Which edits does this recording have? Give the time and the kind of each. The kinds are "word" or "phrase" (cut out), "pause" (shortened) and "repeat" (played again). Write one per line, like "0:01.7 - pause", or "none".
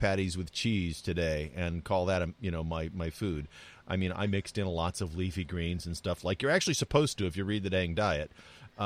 none